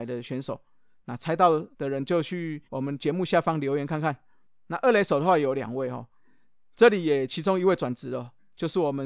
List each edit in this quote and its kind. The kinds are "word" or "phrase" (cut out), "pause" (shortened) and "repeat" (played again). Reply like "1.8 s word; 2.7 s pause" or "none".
1.7 s pause; 2.7 s pause